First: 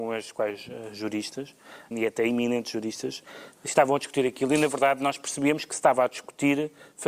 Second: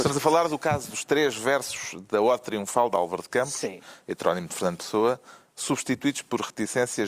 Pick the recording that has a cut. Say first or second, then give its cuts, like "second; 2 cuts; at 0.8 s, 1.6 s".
first; 1 cut; at 1.9 s